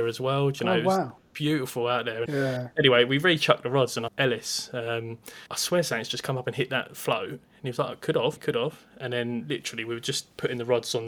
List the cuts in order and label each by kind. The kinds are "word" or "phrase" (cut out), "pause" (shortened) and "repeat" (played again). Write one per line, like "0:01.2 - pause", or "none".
0:02.3 - word
0:04.1 - phrase
0:05.5 - pause
0:08.4 - word